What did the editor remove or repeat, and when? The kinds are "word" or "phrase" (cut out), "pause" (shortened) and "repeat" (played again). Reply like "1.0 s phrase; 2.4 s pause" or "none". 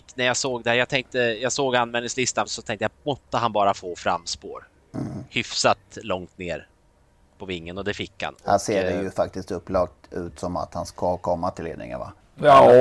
2.5 s word